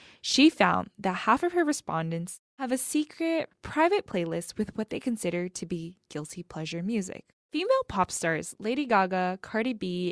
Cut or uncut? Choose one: cut